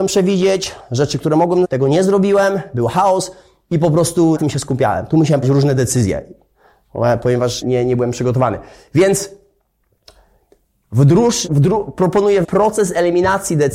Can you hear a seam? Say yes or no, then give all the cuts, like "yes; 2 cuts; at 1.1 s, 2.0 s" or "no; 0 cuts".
yes; 6 cuts; at 1.6 s, 4.4 s, 5.4 s, 7.6 s, 11.5 s, 12.4 s